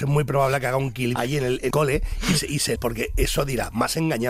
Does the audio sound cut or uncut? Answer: cut